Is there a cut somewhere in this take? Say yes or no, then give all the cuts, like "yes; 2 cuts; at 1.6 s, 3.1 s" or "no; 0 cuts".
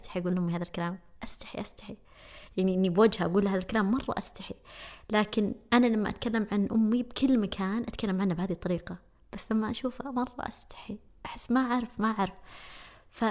no; 0 cuts